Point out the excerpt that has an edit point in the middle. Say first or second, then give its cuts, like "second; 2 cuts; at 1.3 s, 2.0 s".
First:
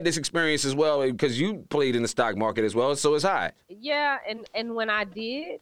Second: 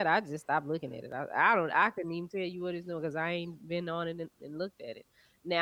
first; 1 cut; at 3.6 s